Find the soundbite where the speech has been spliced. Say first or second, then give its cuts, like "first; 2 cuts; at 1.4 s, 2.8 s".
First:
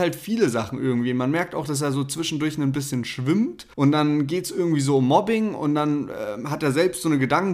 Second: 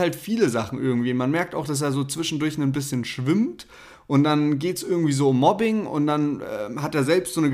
first; 1 cut; at 3.7 s